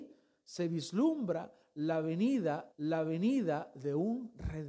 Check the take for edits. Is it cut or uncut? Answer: cut